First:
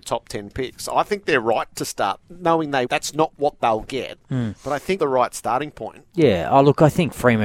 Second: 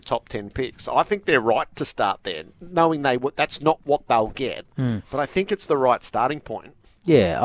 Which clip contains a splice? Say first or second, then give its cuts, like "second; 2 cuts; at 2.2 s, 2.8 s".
first; 4 cuts; at 2.2 s, 2.8 s, 5.0 s, 6.1 s